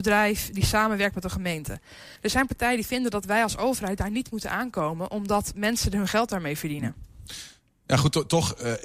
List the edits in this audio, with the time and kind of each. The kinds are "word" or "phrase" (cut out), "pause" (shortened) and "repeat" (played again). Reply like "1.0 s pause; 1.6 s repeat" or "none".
2.2 s pause